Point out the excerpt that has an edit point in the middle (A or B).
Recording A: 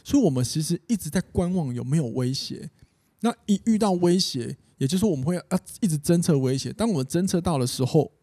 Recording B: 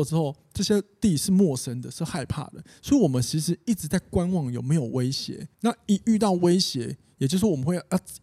B